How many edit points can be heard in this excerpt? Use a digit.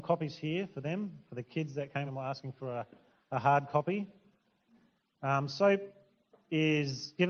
1